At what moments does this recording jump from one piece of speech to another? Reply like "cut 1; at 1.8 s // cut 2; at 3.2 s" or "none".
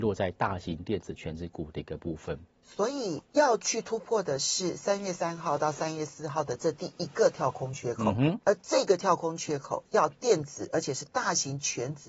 cut 1; at 2.5 s // cut 2; at 3.2 s // cut 3; at 8.4 s